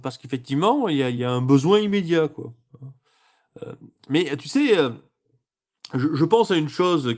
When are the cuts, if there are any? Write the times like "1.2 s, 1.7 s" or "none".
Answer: none